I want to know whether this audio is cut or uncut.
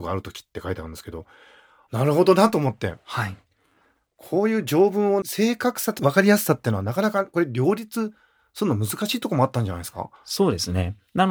uncut